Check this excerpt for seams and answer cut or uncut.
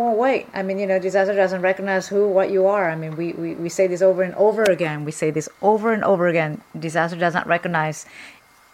uncut